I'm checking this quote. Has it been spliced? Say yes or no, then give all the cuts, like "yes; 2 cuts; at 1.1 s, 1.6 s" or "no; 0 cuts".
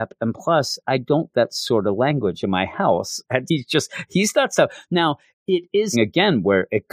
yes; 3 cuts; at 1.3 s, 3.5 s, 5.9 s